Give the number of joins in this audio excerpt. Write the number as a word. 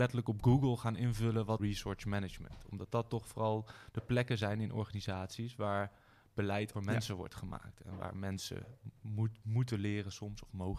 two